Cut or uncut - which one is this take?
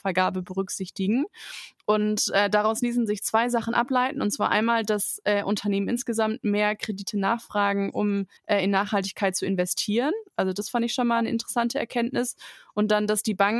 cut